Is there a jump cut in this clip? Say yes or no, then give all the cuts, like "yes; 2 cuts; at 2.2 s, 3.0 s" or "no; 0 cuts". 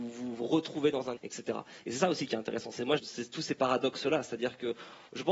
yes; 2 cuts; at 1.2 s, 3.0 s